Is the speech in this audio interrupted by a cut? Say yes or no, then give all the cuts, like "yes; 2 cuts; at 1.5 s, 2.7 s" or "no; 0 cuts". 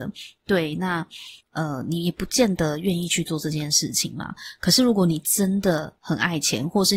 yes; 1 cut; at 1.4 s